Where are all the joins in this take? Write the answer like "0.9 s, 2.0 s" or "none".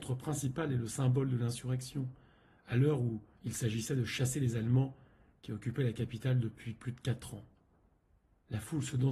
none